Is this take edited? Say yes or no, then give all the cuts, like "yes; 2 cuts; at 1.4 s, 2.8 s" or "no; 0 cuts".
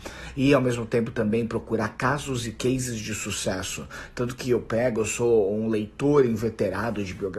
no; 0 cuts